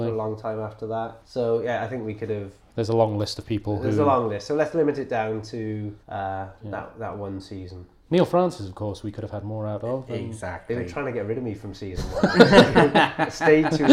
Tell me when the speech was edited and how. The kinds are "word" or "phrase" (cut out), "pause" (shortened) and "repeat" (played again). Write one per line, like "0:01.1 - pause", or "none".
0:01.2 - pause
0:06.0 - pause